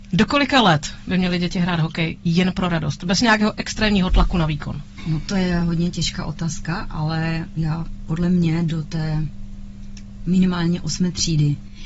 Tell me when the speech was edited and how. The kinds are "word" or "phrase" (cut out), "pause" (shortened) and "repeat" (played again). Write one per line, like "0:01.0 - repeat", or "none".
none